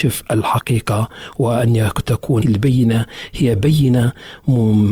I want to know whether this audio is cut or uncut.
cut